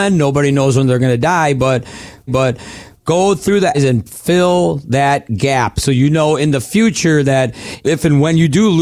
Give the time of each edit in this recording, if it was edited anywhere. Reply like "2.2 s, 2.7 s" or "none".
2.3 s, 3.7 s